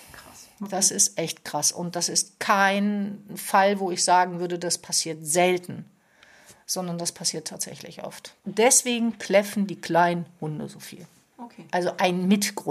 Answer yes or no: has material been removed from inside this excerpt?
no